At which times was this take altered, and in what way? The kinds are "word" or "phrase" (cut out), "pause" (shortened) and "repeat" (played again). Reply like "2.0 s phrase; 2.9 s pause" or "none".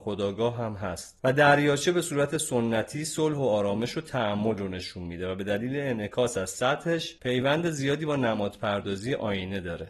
none